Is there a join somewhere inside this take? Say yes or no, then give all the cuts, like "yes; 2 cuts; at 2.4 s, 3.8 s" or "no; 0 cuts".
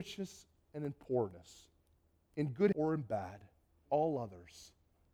yes; 3 cuts; at 1.9 s, 2.7 s, 3.9 s